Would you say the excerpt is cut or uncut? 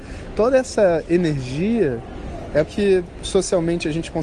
cut